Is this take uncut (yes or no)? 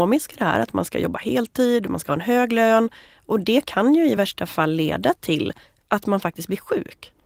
yes